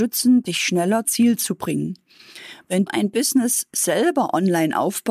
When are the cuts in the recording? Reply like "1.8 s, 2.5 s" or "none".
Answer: 1.0 s, 2.9 s